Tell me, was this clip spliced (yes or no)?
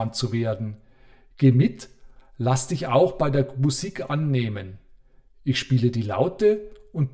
no